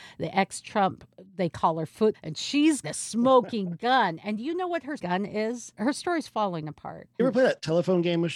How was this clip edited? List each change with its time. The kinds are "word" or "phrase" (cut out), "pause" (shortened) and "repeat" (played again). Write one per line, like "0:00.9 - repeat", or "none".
0:02.1 - word
0:02.8 - word
0:05.0 - word